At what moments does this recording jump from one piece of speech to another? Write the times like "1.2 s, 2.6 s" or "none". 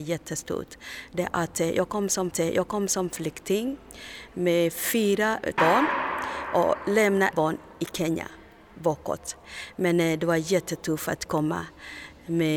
2.3 s, 5.6 s, 7.3 s